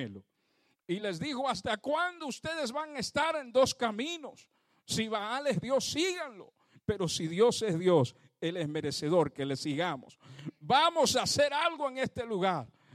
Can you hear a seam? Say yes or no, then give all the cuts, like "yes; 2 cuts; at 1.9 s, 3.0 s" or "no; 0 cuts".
no; 0 cuts